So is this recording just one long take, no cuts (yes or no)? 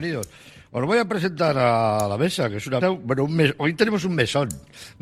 no